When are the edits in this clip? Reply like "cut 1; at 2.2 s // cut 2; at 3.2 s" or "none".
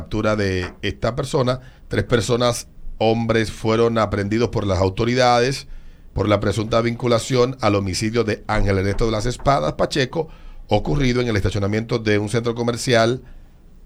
cut 1; at 1.8 s